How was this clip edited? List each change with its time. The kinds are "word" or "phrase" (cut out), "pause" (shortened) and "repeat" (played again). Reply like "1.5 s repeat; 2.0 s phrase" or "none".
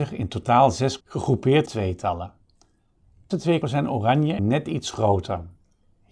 1.0 s word; 1.7 s word; 3.3 s word; 3.6 s word; 4.4 s word